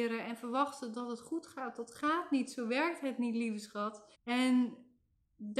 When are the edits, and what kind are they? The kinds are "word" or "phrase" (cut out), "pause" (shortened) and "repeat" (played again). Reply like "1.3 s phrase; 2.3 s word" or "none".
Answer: 4.1 s pause

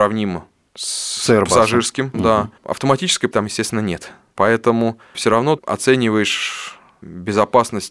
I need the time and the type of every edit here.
2.1 s word; 2.6 s word; 3.3 s word; 5.6 s word

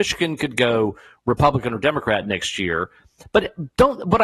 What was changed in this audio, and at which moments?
none

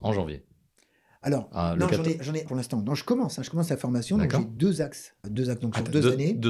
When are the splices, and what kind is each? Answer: 2.5 s word; 5.2 s word

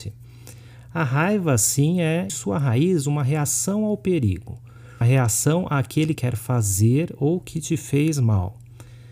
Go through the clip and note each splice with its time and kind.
2.3 s word; 5.0 s word; 6.1 s word

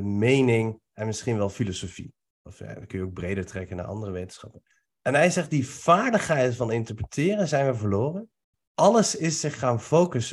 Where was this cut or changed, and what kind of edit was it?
4.7 s pause; 8.5 s pause

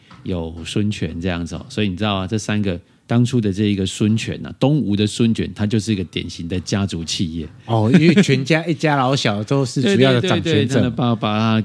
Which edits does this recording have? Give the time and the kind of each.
2.9 s pause

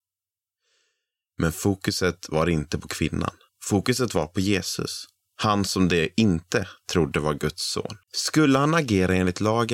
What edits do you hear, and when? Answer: 3.5 s pause; 5.1 s pause; 8.0 s pause

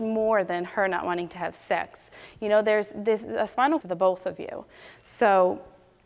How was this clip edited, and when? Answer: 3.8 s phrase

